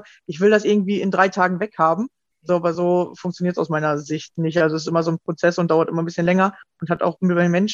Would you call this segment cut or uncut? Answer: uncut